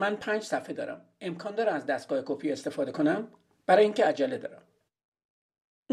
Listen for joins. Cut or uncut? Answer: uncut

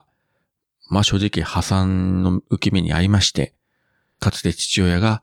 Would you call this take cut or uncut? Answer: uncut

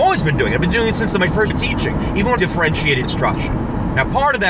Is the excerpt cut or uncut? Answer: cut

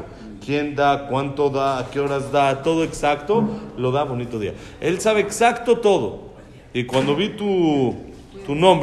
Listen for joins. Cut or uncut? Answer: uncut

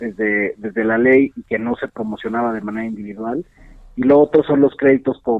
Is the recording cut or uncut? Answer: uncut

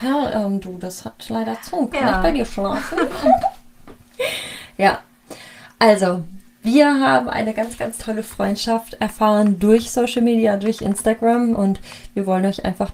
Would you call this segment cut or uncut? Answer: uncut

